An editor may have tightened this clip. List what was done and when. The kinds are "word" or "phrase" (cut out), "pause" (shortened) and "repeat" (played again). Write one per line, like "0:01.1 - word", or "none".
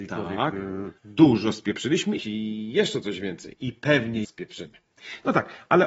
0:01.0 - pause
0:02.2 - phrase
0:04.2 - phrase

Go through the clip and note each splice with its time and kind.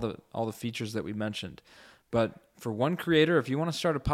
none

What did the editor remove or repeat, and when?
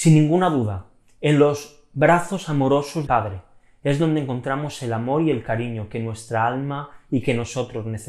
0:03.1 - word

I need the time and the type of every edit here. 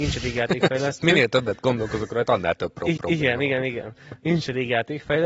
0:03.0 - repeat

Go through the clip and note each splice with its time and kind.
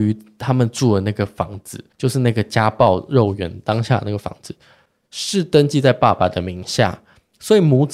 0:01.9 - pause

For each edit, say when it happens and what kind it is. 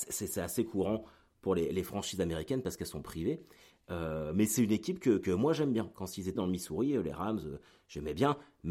0:06.4 - phrase

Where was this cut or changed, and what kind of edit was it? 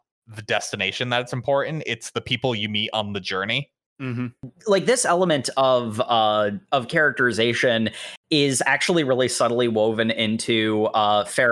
0:03.8 - pause

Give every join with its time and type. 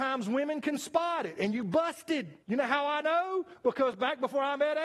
0:02.4 - pause

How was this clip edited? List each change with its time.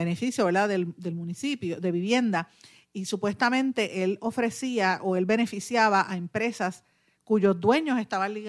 none

